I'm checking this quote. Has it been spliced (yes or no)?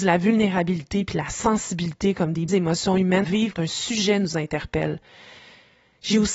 yes